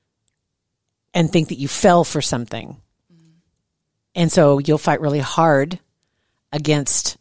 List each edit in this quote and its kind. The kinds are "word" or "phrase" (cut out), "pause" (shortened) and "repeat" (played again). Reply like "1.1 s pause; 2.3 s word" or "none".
none